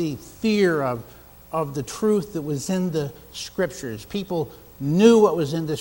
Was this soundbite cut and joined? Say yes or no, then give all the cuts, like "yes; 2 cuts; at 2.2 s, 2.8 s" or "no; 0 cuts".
no; 0 cuts